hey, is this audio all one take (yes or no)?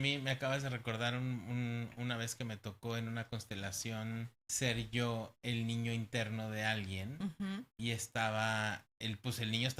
no